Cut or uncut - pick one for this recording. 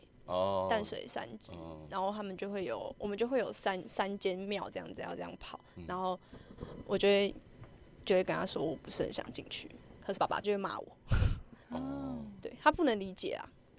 cut